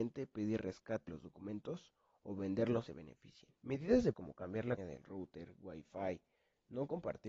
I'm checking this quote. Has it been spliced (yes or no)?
yes